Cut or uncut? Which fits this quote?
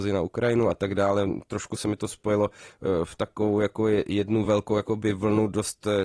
uncut